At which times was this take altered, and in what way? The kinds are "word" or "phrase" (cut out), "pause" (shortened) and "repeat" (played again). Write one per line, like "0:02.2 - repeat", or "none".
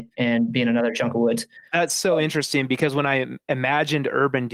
none